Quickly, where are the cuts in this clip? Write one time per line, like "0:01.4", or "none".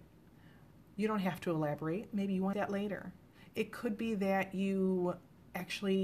0:02.5